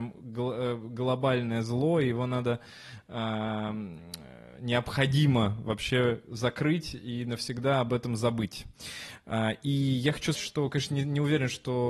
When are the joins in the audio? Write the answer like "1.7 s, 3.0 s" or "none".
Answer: 10.3 s